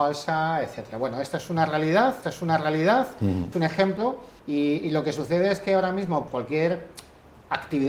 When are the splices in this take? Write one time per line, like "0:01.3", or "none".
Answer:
0:02.2
0:03.5
0:04.4
0:06.3